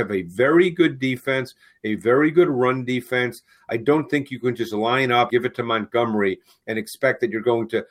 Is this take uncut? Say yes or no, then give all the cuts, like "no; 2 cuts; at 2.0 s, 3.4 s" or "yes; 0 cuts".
no; 1 cut; at 5.3 s